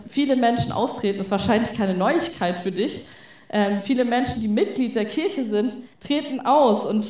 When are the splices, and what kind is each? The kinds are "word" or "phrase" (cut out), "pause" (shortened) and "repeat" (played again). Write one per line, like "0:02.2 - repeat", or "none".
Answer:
0:05.9 - pause

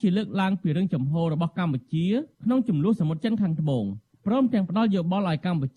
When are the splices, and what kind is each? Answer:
0:02.3 - pause

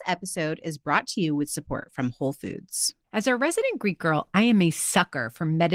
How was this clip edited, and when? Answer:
0:03.0 - pause

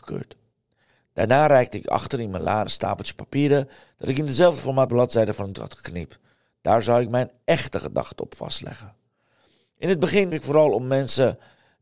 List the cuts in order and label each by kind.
0:02.7 - word
0:04.9 - word
0:05.5 - word
0:10.3 - word

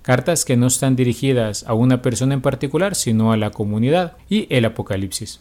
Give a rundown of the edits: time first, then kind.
0:04.2 - pause

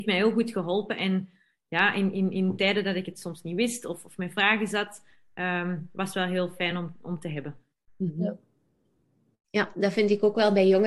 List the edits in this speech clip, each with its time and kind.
none

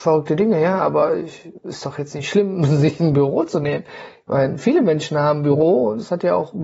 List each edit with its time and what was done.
none

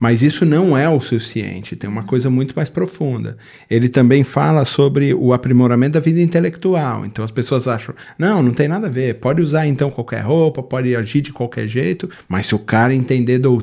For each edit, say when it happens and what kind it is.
none

